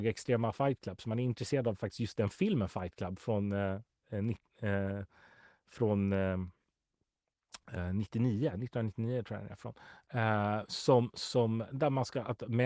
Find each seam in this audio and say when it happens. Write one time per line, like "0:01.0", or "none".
none